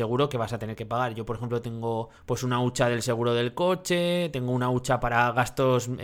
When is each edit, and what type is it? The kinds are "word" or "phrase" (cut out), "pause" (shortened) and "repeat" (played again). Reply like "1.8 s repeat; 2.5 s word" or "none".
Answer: 2.2 s pause